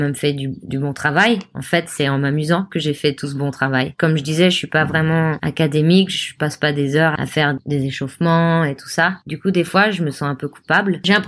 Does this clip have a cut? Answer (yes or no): no